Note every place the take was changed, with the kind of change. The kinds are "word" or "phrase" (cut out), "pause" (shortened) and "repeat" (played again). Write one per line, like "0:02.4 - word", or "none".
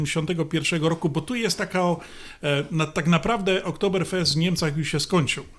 none